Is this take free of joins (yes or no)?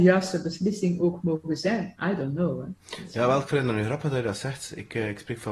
yes